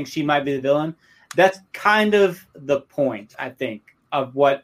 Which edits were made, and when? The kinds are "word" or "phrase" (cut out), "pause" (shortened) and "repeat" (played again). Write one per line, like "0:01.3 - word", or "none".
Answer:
none